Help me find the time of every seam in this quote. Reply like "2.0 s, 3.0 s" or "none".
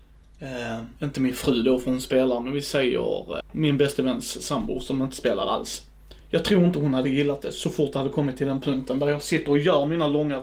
1.0 s, 3.4 s, 6.2 s